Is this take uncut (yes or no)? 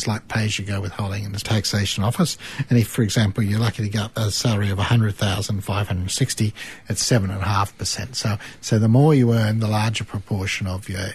no